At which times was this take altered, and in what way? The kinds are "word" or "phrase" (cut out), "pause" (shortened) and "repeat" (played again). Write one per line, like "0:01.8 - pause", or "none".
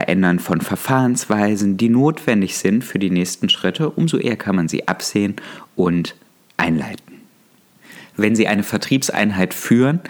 none